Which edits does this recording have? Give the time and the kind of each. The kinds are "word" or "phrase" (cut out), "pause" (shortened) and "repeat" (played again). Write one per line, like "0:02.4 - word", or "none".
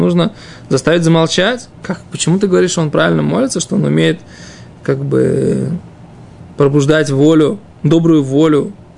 0:01.7 - pause